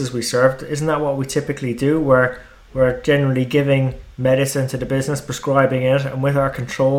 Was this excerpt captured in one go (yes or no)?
yes